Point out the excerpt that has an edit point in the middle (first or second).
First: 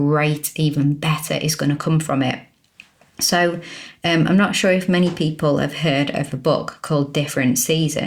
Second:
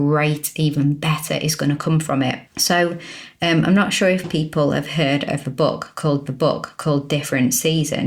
second